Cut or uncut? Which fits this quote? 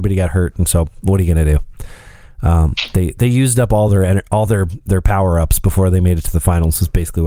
uncut